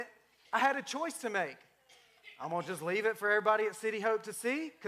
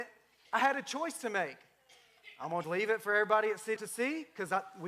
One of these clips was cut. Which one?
second; 2 cuts; at 2.6 s, 3.8 s

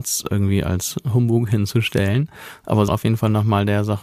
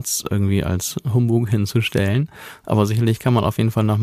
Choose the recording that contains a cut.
first; 1 cut; at 2.9 s

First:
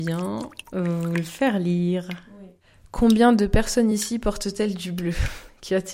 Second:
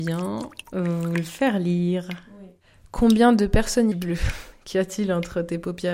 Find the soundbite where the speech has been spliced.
second; 1 cut; at 3.9 s

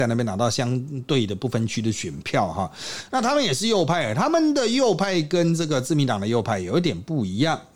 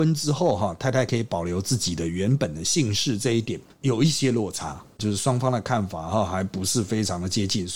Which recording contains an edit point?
second; 1 cut; at 5.0 s

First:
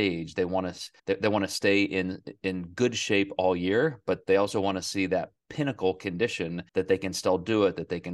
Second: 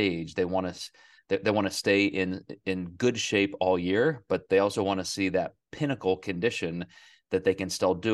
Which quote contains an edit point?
first; 2 cuts; at 1.0 s, 6.7 s

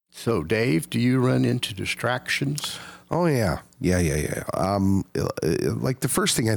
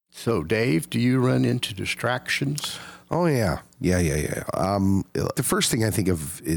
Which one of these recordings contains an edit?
second; 1 cut; at 5.3 s

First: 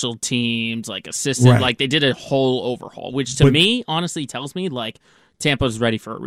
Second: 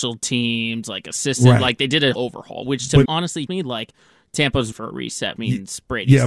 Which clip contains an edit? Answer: second; 5 cuts; at 2.1 s, 3.0 s, 3.5 s, 4.7 s, 5.4 s

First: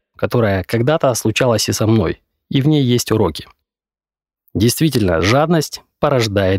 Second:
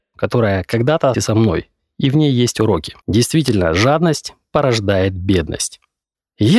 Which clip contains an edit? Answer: second; 2 cuts; at 1.1 s, 3.0 s

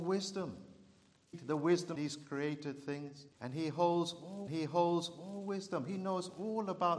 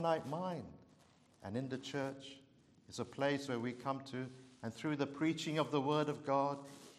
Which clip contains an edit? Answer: first; 4 cuts; at 1.3 s, 2.0 s, 3.3 s, 4.5 s

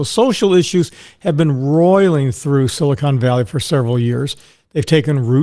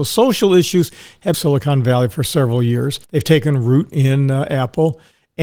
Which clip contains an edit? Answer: second; 2 cuts; at 1.3 s, 3.0 s

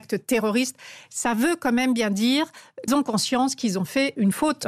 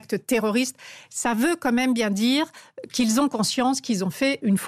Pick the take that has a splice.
first; 1 cut; at 2.9 s

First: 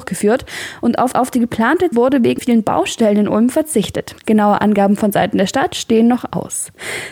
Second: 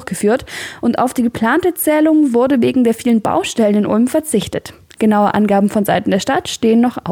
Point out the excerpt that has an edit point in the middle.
first; 4 cuts; at 1.1 s, 1.9 s, 2.4 s, 4.2 s

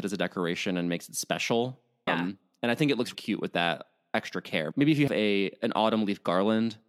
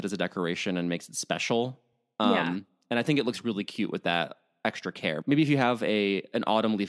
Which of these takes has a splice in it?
first; 3 cuts; at 2.1 s, 3.1 s, 5.1 s

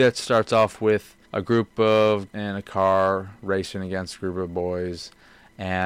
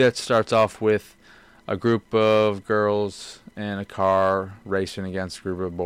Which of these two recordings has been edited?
first; 2 cuts; at 1.2 s, 2.3 s

